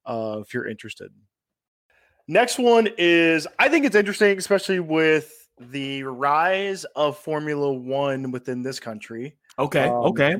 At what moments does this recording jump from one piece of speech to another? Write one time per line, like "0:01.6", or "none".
none